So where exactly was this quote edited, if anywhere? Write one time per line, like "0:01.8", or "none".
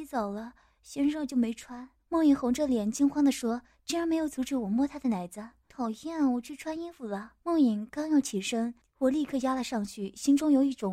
0:02.0
0:05.7
0:07.4
0:08.8